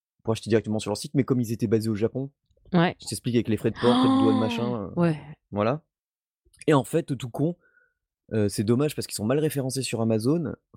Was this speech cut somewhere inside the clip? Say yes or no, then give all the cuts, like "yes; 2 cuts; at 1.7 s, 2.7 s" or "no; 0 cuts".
no; 0 cuts